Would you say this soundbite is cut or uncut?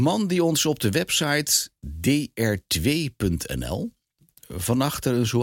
cut